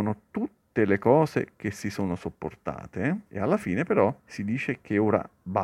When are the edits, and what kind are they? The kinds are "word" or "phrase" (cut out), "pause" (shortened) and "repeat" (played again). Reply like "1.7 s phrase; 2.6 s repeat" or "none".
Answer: 3.3 s pause; 4.2 s pause